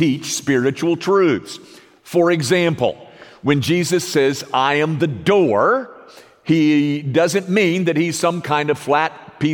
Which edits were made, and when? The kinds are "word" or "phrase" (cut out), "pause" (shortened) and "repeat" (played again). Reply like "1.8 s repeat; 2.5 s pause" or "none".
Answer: none

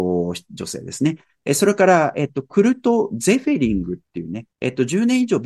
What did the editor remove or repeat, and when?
4.5 s pause

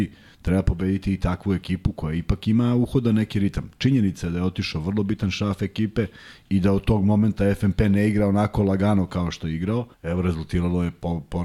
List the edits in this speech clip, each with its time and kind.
9.9 s pause

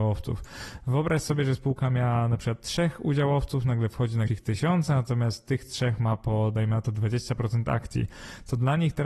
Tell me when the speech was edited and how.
4.3 s phrase

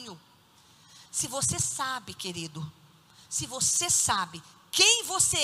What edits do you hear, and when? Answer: none

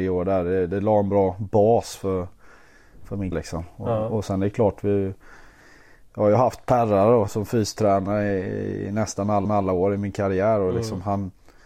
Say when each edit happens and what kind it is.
3.3 s word; 7.3 s word; 9.4 s repeat

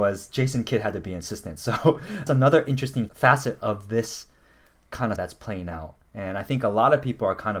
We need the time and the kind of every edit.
2.3 s word; 3.1 s word; 5.2 s word

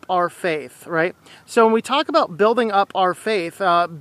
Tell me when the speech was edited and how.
none

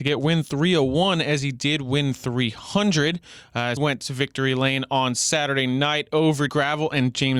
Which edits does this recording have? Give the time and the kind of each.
3.8 s word; 6.5 s word

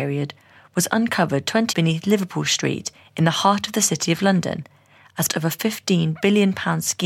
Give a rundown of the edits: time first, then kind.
1.7 s word; 5.3 s word

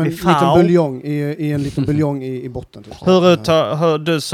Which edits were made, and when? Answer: none

